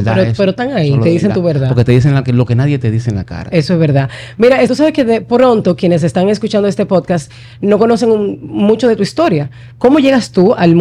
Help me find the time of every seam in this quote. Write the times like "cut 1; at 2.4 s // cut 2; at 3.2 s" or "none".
cut 1; at 2.2 s // cut 2; at 4.7 s